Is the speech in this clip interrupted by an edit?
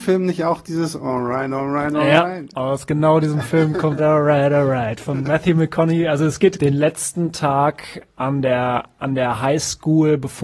yes; 2 cuts; at 4.0 s, 6.6 s

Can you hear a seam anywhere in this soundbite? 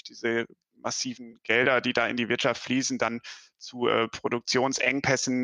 no; 0 cuts

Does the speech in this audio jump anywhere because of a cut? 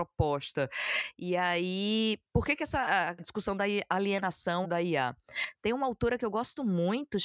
yes; 2 cuts; at 3.2 s, 4.6 s

